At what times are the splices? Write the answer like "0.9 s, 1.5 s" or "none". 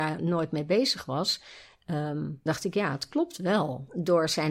2.5 s